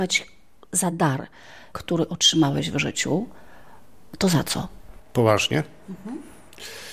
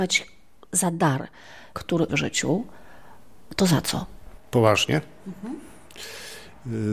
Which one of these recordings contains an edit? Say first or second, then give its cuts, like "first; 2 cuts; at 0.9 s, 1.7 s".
second; 1 cut; at 2.1 s